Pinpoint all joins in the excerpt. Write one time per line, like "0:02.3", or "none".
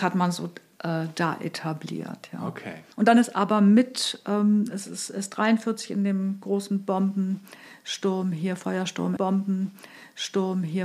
0:02.9
0:09.2